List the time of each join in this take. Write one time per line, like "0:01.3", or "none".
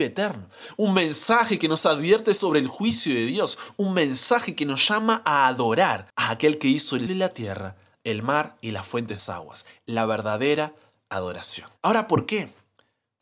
0:06.1
0:07.1
0:09.2
0:11.8